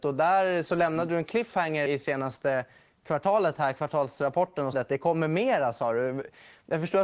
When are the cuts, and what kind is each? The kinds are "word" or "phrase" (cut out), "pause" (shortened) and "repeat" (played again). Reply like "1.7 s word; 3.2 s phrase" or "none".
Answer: 1.9 s word; 4.7 s word